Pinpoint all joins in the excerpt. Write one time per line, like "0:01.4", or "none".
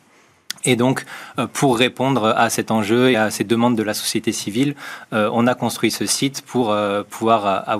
0:03.1